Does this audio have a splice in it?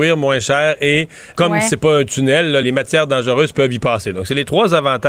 yes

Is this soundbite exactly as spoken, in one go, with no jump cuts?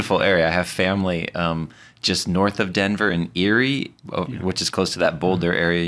yes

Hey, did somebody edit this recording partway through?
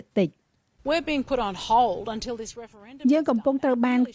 no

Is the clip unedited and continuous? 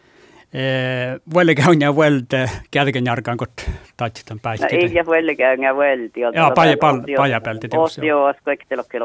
yes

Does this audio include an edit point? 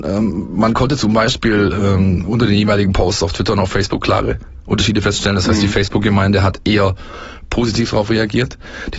no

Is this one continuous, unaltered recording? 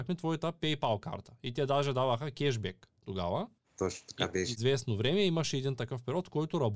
no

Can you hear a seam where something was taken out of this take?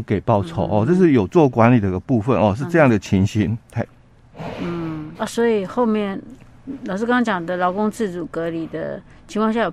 yes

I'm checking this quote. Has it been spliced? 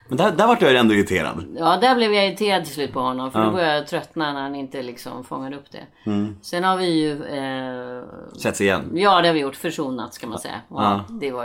no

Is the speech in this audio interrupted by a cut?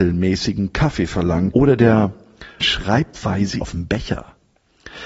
yes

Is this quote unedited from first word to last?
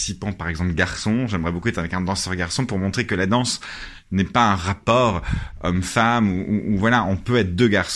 yes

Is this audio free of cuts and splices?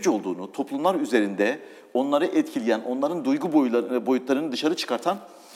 yes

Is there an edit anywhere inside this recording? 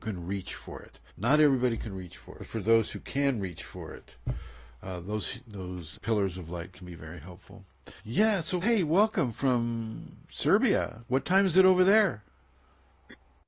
yes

